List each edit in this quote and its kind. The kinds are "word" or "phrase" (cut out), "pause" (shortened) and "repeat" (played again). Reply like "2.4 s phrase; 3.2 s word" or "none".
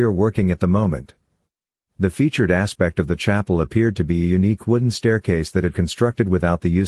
none